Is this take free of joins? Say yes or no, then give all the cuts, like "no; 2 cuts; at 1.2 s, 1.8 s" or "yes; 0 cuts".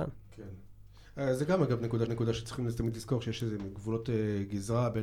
no; 1 cut; at 2.1 s